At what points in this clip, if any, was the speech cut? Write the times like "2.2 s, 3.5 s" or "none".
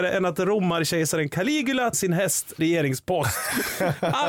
1.9 s, 2.6 s